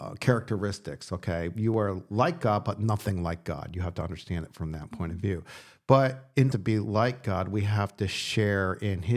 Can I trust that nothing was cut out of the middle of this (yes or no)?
no